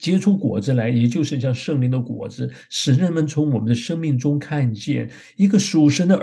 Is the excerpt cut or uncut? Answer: uncut